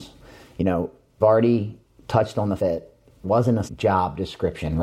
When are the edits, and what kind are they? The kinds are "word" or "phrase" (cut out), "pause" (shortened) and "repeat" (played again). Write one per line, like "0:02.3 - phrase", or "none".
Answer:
0:01.2 - word
0:02.6 - word
0:03.2 - word
0:03.7 - word